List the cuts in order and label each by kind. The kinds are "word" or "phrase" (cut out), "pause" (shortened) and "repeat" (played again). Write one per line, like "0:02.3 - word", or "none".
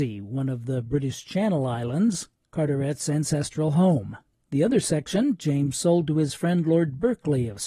0:02.3 - pause
0:04.2 - pause

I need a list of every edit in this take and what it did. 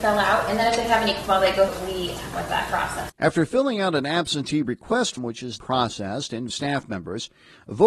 0:01.3 - word
0:01.7 - word
0:02.3 - phrase
0:03.1 - pause
0:05.2 - word
0:05.6 - word
0:06.5 - phrase

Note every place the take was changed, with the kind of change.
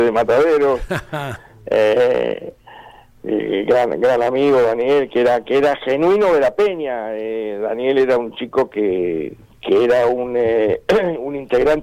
0:08.7 - word
0:09.4 - pause

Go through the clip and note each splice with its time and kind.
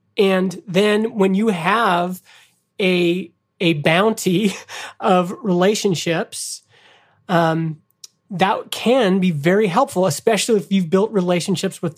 none

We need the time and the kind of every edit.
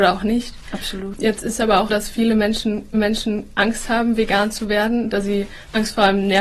0:01.9 - word
0:02.9 - repeat

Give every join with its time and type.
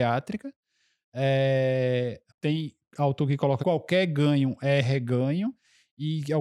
0:02.3 - phrase
0:03.6 - word

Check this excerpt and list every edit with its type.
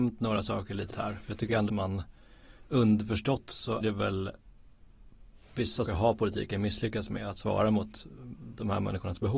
0:00.9 - word
0:01.7 - word
0:03.8 - word
0:05.8 - word

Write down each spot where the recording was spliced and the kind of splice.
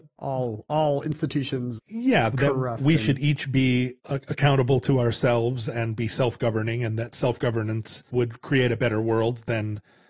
0:01.8 - word
0:02.3 - word
0:04.0 - word
0:08.1 - pause

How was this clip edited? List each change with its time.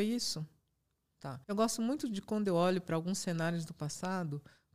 0:01.4 - pause

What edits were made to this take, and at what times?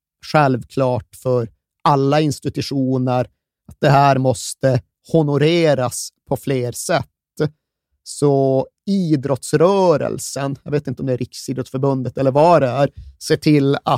none

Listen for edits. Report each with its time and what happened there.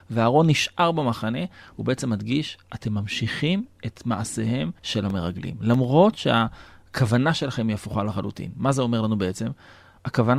0:04.8 - pause

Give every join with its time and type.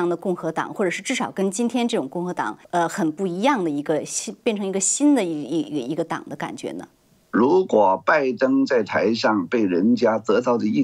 0:02.6 - pause
0:07.0 - pause

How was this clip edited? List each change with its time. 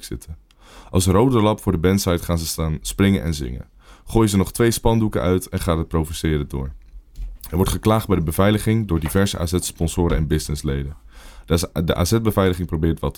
none

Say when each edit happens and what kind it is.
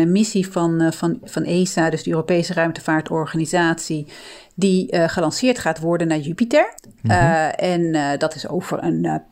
0:06.8 - pause

